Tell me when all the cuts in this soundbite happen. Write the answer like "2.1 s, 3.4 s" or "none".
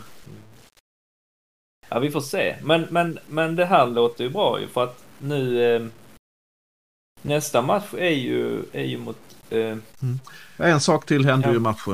9.9 s